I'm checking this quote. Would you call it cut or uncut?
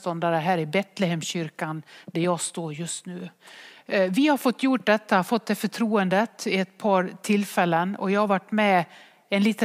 uncut